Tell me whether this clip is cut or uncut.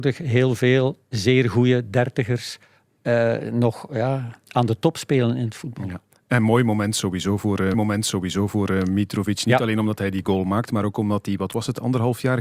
cut